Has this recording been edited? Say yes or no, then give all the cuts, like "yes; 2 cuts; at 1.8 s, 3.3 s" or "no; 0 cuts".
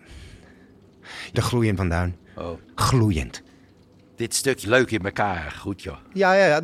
yes; 4 cuts; at 1.3 s, 1.8 s, 2.6 s, 4.6 s